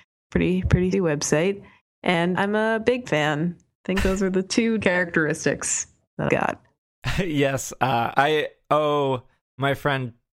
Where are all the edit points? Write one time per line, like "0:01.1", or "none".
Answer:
0:00.9
0:02.4
0:03.1
0:04.8
0:06.3
0:08.1